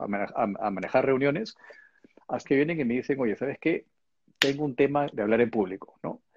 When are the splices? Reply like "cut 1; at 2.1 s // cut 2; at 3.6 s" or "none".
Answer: cut 1; at 2.4 s // cut 2; at 5.1 s